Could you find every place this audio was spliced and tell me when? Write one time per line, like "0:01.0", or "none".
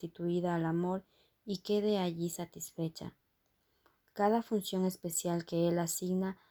none